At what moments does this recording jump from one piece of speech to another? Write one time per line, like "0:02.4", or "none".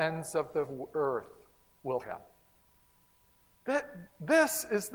0:02.0